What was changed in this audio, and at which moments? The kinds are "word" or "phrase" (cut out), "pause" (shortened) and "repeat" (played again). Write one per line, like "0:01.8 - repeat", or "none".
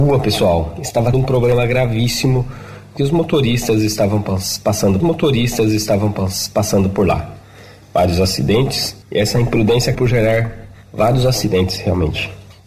0:01.1 - word
0:03.0 - phrase
0:05.0 - repeat
0:09.0 - pause
0:09.9 - word
0:10.8 - pause